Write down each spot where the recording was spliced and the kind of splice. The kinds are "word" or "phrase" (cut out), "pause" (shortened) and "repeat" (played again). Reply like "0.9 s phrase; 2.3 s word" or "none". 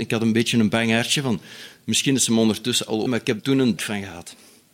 3.1 s word; 3.4 s word; 3.8 s word